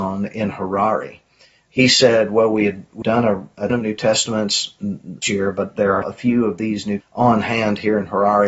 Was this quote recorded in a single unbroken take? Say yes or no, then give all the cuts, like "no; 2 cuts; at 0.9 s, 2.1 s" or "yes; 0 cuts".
no; 5 cuts; at 3.0 s, 3.7 s, 5.2 s, 6.0 s, 7.0 s